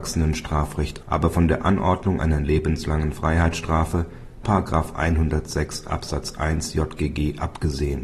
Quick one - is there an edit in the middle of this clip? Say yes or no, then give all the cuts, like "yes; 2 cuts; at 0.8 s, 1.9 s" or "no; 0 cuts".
yes; 2 cuts; at 1.0 s, 4.4 s